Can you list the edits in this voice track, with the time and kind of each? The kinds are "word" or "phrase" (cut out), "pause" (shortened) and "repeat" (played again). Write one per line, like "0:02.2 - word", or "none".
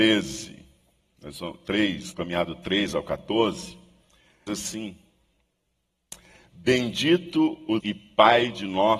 0:02.1 - word
0:04.5 - word
0:07.8 - word